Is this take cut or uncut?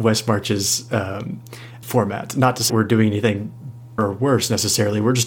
cut